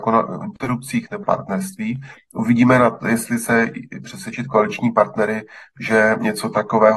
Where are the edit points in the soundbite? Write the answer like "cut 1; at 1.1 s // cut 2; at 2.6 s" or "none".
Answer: cut 1; at 1.2 s // cut 2; at 4.0 s